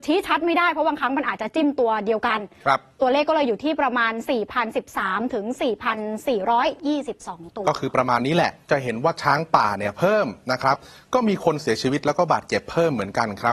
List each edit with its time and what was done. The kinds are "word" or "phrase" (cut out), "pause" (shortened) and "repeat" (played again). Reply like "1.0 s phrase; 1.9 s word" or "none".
none

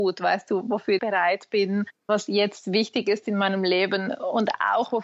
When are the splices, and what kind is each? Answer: 1.0 s word

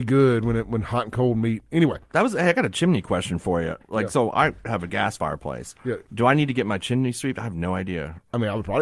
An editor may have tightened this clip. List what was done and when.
none

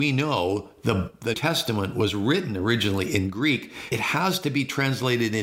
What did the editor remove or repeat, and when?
1.3 s word; 3.9 s word

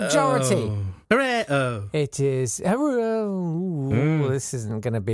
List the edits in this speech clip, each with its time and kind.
1.0 s pause

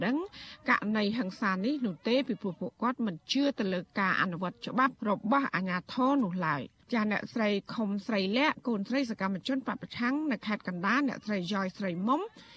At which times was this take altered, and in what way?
5.0 s pause; 6.8 s pause

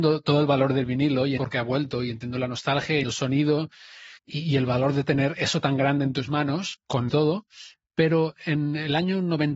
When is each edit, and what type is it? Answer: 1.4 s word; 3.0 s word; 4.2 s pause; 7.1 s phrase

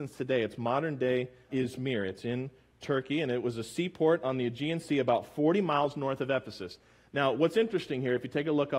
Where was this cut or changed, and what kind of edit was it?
1.5 s word

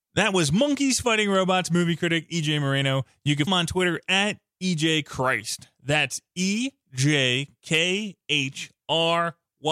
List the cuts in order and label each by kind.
3.5 s word

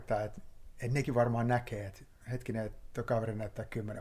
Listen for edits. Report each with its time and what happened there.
none

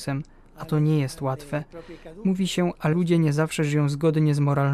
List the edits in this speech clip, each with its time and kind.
2.9 s word

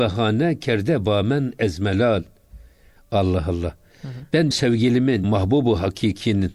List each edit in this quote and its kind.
4.5 s word; 5.2 s word

